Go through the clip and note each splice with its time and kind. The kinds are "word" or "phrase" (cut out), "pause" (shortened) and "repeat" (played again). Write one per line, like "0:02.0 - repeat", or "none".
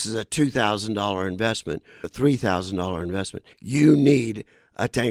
0:02.0 - word
0:03.5 - pause